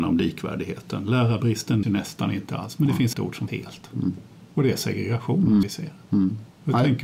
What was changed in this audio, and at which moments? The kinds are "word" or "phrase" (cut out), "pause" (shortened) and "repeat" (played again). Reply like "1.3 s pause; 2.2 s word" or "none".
1.8 s word; 3.1 s word; 3.5 s word; 5.6 s word